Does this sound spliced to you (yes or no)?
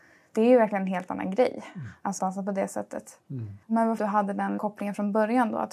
yes